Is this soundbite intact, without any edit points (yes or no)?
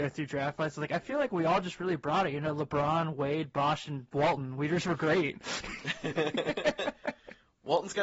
yes